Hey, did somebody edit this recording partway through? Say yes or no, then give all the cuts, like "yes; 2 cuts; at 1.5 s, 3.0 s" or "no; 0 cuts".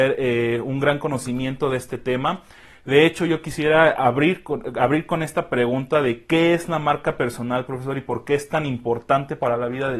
no; 0 cuts